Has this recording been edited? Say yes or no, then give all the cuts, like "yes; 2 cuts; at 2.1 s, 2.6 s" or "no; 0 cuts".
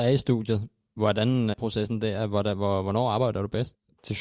yes; 1 cut; at 1.5 s